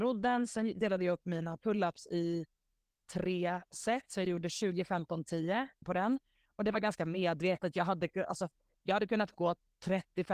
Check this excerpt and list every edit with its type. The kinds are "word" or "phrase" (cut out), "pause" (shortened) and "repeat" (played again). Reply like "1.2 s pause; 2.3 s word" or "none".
3.0 s word; 5.8 s word